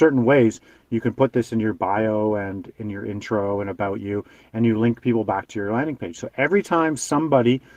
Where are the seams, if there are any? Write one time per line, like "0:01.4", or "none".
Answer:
none